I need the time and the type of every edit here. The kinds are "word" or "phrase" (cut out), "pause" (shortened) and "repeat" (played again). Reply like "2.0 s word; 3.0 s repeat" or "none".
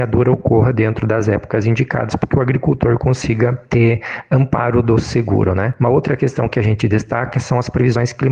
none